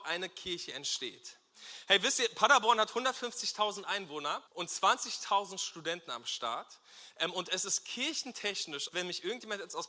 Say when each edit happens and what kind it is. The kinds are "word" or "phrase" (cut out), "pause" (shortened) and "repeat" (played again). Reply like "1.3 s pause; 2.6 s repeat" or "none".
4.5 s pause; 8.9 s word

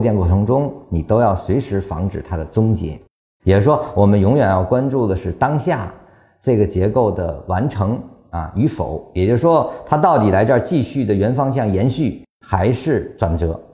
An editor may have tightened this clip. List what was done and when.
none

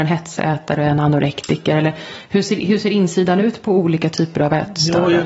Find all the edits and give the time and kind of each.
none

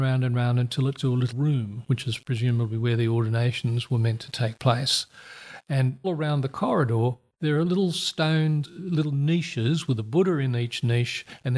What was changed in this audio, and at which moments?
1.0 s word; 1.3 s word; 6.0 s word; 8.6 s word

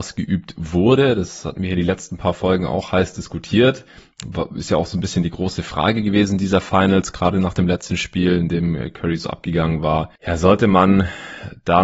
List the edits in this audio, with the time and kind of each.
none

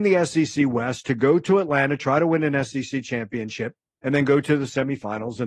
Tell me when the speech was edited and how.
none

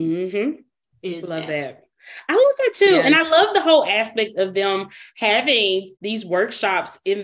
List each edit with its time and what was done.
6.0 s pause

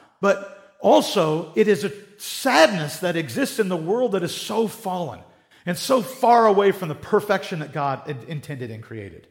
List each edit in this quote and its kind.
none

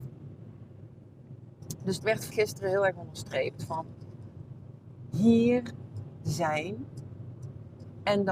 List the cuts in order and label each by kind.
2.0 s word; 2.3 s word

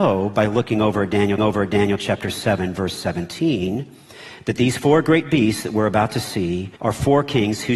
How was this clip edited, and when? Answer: 1.4 s repeat; 6.8 s pause

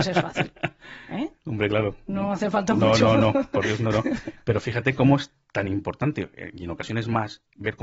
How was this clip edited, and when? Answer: 1.4 s pause

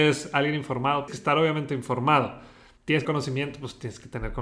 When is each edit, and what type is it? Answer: 1.1 s phrase; 3.0 s phrase

